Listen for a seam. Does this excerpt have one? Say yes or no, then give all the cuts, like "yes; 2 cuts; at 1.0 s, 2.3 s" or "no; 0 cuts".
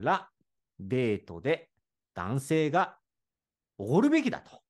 no; 0 cuts